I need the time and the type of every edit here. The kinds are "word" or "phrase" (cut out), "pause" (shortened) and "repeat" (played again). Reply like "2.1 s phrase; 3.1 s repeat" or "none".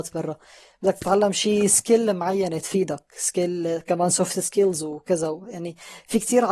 none

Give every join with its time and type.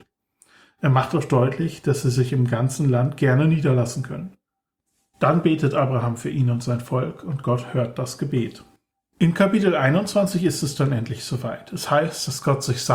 none

